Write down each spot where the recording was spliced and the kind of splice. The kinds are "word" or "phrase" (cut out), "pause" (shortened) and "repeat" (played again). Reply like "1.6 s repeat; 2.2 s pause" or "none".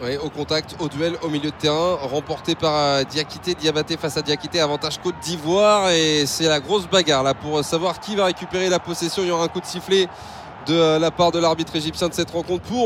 none